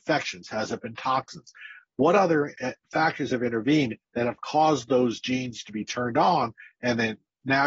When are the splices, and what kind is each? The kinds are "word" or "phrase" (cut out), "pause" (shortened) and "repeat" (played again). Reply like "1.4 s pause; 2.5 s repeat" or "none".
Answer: 2.8 s pause